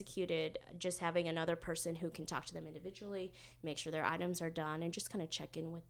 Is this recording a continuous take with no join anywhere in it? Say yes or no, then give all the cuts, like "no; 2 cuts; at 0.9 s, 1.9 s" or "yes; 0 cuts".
yes; 0 cuts